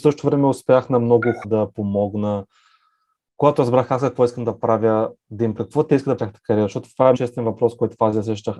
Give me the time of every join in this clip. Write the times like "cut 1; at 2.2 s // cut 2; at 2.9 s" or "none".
cut 1; at 1.4 s // cut 2; at 5.6 s // cut 3; at 6.2 s // cut 4; at 7.1 s